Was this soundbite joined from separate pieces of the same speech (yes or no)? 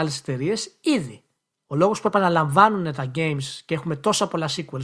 no